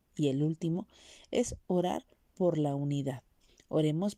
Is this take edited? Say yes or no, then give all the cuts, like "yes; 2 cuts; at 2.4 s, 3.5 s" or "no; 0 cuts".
no; 0 cuts